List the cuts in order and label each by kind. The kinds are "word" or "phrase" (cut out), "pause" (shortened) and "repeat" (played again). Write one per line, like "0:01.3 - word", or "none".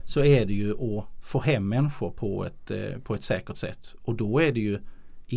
none